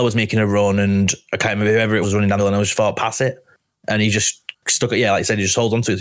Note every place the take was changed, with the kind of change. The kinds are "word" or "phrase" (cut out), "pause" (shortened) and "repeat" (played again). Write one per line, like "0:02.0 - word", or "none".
0:02.0 - word
0:02.4 - word